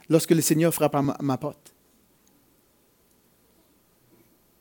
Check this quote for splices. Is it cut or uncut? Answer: uncut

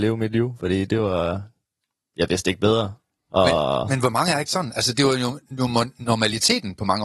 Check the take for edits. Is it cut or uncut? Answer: uncut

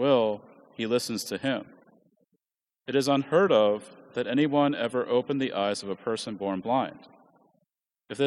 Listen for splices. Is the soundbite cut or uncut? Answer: uncut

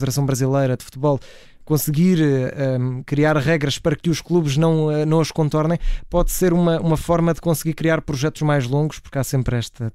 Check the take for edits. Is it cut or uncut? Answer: uncut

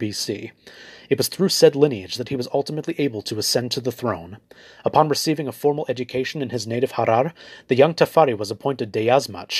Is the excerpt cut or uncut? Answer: uncut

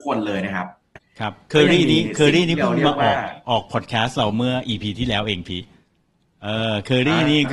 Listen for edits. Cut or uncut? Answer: uncut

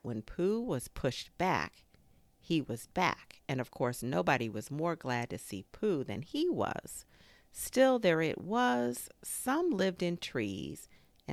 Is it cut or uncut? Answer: uncut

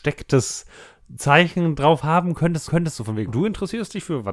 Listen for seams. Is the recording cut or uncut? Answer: cut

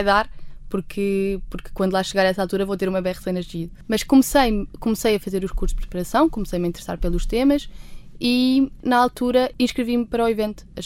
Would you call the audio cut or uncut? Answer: uncut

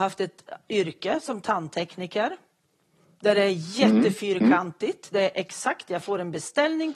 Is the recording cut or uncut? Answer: uncut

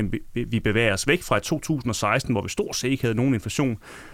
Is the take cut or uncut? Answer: uncut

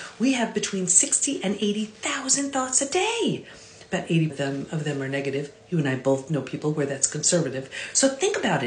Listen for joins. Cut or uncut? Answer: cut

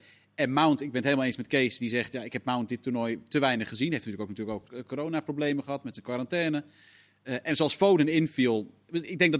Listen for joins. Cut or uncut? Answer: cut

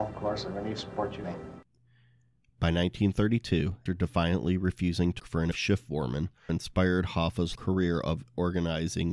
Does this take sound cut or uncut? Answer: cut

